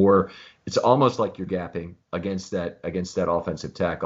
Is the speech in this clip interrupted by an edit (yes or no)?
yes